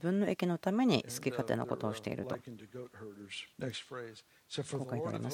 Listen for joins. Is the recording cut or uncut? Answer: cut